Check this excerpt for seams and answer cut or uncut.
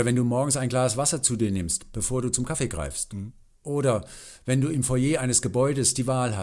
uncut